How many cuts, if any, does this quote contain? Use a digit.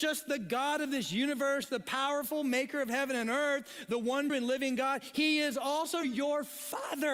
2